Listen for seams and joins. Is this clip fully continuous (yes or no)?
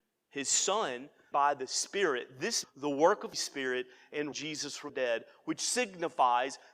no